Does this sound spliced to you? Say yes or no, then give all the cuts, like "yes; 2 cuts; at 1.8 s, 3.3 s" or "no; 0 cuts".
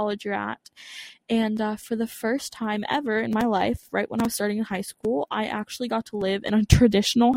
no; 0 cuts